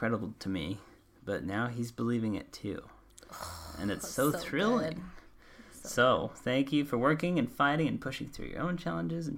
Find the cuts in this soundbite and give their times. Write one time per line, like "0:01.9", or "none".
none